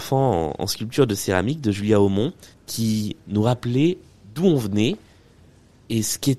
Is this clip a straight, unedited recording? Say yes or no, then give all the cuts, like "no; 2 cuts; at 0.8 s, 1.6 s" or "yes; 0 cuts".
no; 1 cut; at 2.5 s